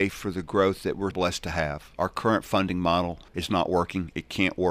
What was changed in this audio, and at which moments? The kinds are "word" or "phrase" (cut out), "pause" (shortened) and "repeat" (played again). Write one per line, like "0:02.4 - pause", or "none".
0:01.1 - word
0:03.3 - pause